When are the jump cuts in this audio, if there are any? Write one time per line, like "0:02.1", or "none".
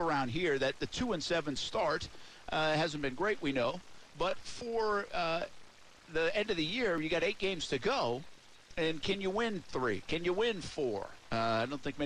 none